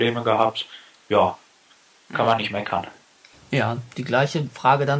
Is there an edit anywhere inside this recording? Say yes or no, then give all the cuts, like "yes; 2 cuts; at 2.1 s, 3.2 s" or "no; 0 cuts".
no; 0 cuts